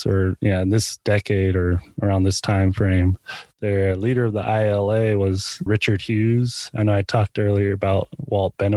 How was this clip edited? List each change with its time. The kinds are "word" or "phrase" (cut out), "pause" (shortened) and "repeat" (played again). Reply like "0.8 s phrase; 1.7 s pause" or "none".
5.7 s phrase